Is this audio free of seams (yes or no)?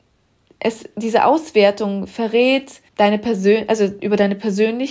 no